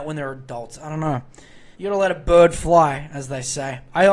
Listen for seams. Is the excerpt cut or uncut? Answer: cut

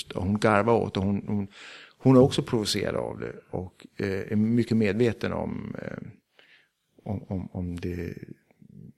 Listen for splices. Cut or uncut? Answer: uncut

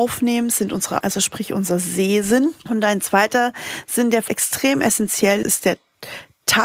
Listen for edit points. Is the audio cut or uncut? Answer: cut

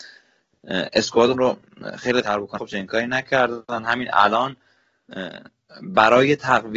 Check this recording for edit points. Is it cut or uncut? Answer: cut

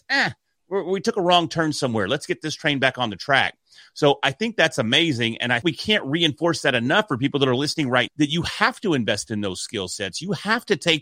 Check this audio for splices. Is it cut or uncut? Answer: cut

